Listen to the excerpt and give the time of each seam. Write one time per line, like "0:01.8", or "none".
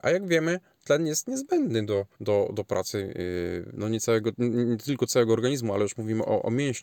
0:02.1